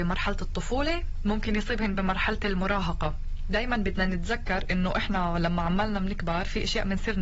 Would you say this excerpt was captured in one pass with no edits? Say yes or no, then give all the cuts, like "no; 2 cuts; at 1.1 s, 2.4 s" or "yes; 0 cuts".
yes; 0 cuts